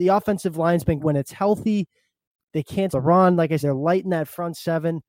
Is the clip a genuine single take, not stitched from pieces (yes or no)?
no